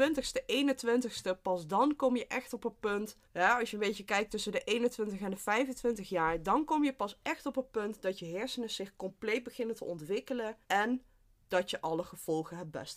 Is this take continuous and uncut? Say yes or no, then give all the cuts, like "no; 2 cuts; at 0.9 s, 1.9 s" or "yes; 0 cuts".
no; 2 cuts; at 3.2 s, 10.6 s